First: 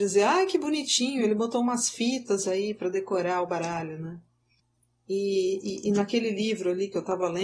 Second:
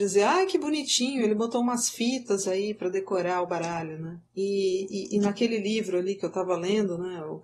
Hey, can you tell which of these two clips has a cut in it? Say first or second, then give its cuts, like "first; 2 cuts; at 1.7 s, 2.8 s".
second; 1 cut; at 4.3 s